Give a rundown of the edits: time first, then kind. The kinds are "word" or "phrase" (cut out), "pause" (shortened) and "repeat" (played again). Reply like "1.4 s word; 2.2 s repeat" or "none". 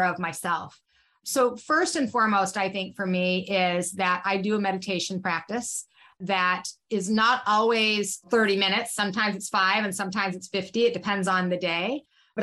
none